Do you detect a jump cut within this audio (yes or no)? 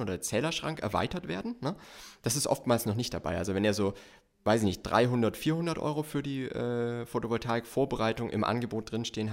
no